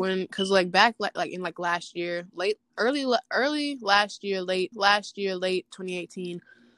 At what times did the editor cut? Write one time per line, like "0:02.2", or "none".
0:04.7